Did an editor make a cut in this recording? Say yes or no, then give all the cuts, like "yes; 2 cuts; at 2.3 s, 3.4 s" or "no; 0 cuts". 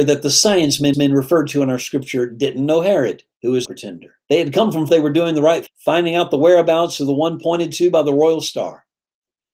yes; 6 cuts; at 0.9 s, 3.3 s, 3.6 s, 4.2 s, 4.9 s, 5.7 s